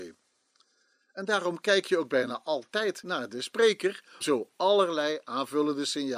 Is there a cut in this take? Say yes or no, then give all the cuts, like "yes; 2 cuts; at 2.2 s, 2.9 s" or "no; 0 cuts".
yes; 1 cut; at 4.2 s